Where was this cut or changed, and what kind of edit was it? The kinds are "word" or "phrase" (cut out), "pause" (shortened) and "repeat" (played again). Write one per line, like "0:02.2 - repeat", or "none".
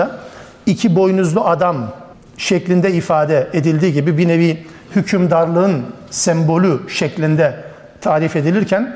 0:02.1 - pause